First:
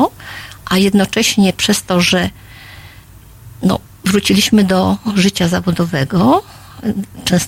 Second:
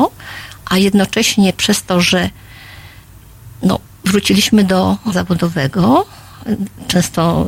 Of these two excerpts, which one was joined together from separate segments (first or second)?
second